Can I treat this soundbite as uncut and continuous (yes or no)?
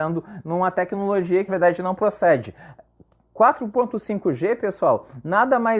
no